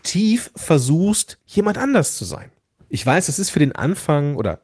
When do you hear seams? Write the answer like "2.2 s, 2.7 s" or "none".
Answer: 1.4 s, 2.8 s